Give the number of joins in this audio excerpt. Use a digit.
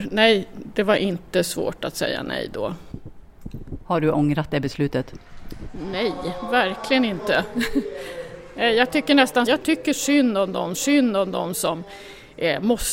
2